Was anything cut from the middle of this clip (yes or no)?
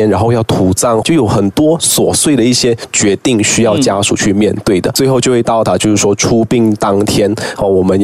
yes